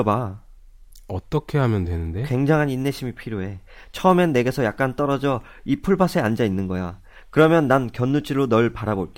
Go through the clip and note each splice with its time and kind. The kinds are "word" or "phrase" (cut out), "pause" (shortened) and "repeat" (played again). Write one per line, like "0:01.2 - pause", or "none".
none